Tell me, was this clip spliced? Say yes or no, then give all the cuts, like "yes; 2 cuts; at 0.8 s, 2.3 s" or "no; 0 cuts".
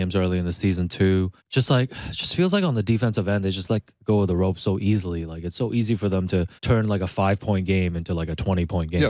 yes; 2 cuts; at 1.4 s, 6.6 s